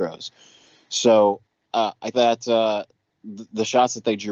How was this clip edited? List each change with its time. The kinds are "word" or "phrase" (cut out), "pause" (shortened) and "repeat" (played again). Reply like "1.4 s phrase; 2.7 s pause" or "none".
1.5 s pause; 2.1 s word